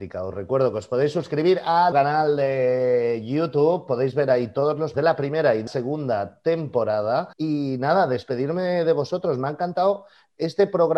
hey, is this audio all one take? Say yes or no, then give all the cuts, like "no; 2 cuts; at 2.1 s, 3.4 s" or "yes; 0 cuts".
no; 4 cuts; at 1.9 s, 4.9 s, 5.7 s, 7.3 s